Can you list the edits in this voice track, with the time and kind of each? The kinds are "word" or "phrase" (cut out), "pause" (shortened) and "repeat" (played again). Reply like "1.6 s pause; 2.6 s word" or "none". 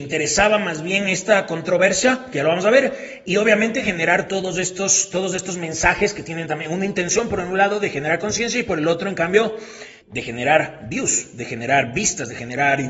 3.3 s word; 10.0 s word